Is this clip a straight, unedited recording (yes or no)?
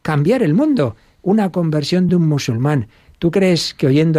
yes